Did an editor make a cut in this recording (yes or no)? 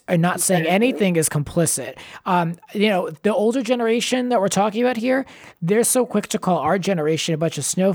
no